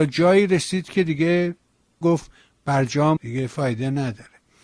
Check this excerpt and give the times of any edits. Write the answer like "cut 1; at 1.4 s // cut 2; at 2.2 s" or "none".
cut 1; at 2.0 s // cut 2; at 3.2 s